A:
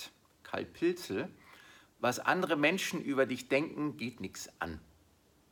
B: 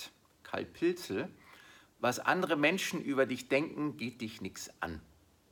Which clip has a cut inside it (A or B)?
A